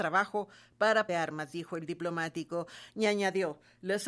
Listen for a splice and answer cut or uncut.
cut